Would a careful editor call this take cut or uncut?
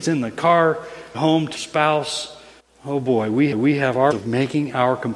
cut